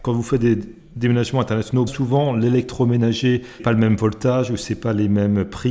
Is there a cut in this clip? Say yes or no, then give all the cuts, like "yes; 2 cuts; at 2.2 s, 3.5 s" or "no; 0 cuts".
yes; 2 cuts; at 1.9 s, 3.6 s